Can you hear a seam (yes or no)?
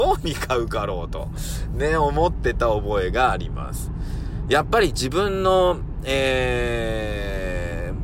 no